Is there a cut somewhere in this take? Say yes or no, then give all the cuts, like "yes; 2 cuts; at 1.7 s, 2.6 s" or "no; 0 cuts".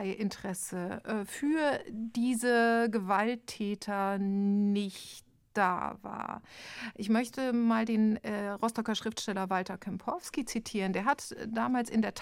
no; 0 cuts